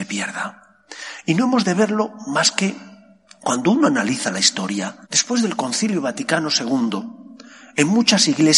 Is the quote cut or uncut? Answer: cut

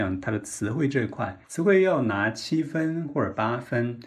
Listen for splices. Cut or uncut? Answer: cut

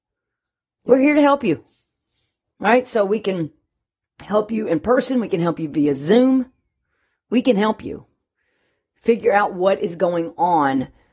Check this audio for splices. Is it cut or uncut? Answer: uncut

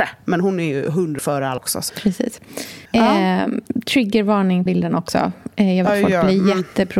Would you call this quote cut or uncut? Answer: cut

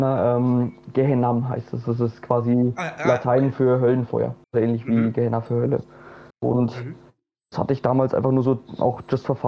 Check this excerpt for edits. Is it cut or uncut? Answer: cut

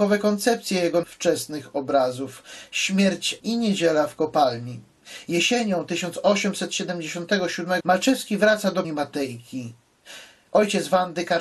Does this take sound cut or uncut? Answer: cut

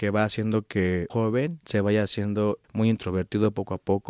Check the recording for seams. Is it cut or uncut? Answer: cut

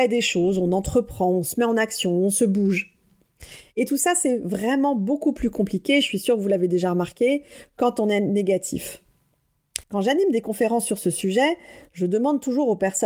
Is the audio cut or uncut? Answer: cut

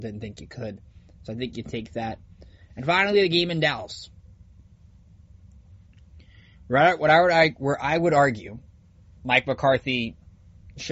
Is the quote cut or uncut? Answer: uncut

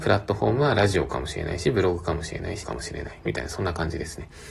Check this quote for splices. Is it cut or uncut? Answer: cut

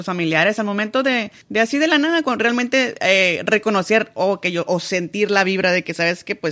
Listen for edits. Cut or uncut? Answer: cut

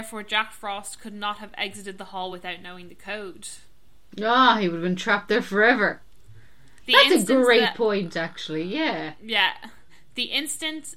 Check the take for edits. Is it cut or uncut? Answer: uncut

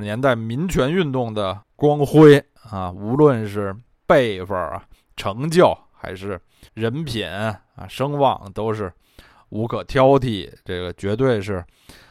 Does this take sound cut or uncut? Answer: cut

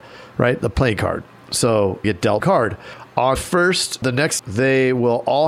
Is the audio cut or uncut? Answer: cut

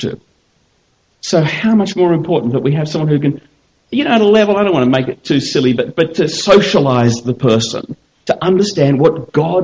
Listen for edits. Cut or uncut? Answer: uncut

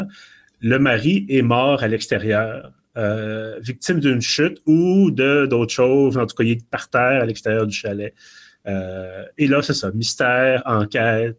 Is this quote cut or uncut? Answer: uncut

